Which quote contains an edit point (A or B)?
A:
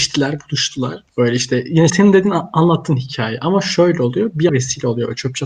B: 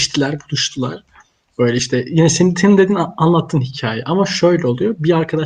A